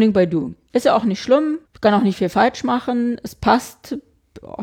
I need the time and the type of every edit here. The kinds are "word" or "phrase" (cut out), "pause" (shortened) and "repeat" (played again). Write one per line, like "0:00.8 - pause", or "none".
0:01.6 - pause